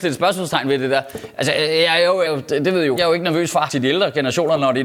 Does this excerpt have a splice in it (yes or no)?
yes